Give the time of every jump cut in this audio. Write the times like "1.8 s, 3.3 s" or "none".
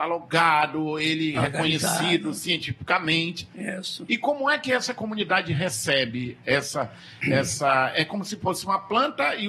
none